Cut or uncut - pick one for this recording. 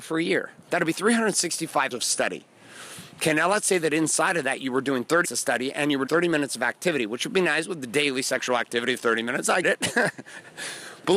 cut